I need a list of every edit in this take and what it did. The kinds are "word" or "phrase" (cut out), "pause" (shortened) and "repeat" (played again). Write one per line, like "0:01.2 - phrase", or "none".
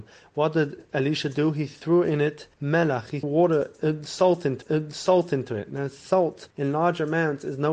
0:02.5 - pause
0:03.2 - word
0:04.6 - repeat
0:06.5 - pause